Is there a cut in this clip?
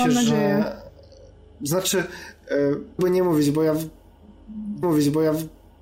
yes; 2 cuts; at 3.0 s, 4.8 s

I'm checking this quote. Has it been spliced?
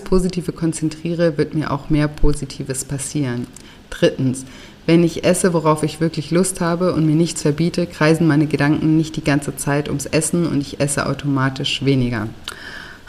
no; 0 cuts

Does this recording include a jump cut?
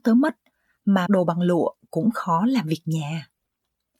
yes; 1 cut; at 1.1 s

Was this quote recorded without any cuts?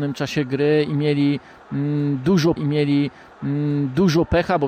no; 1 cut; at 2.6 s

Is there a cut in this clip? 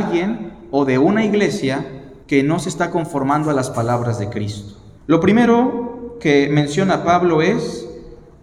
yes; 2 cuts; at 2.2 s, 5.0 s

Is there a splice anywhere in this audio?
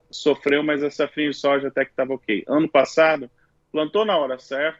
no; 0 cuts

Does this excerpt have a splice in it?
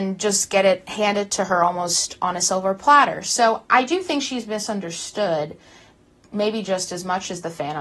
no; 0 cuts

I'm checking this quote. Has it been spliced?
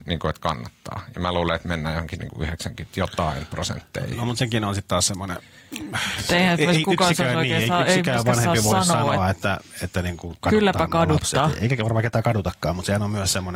no; 0 cuts

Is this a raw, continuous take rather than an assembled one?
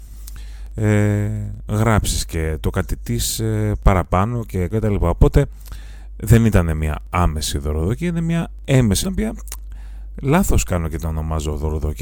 no; 2 cuts; at 4.7 s, 9.0 s

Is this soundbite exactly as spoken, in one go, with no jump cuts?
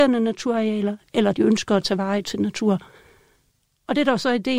no; 2 cuts; at 1.3 s, 2.2 s

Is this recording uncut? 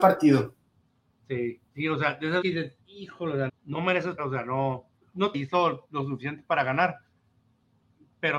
no; 6 cuts; at 1.7 s, 2.4 s, 3.5 s, 4.2 s, 5.0 s, 5.3 s

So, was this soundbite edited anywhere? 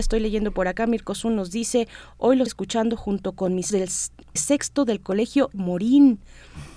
yes; 4 cuts; at 2.5 s, 3.7 s, 4.4 s, 5.5 s

